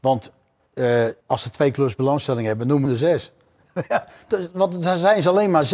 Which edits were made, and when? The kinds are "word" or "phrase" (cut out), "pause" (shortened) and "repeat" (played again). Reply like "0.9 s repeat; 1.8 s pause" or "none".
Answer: 1.2 s pause; 2.8 s word